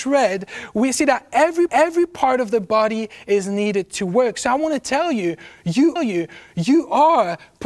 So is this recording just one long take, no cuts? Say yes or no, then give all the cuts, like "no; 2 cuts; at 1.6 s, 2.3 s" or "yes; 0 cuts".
no; 2 cuts; at 1.7 s, 6.0 s